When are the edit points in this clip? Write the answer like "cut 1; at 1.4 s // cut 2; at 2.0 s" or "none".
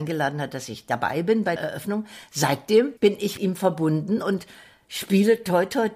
cut 1; at 1.6 s // cut 2; at 3.0 s // cut 3; at 3.4 s